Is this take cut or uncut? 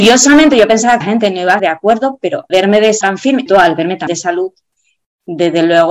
cut